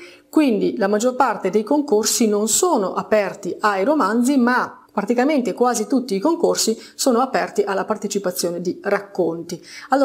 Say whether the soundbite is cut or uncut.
cut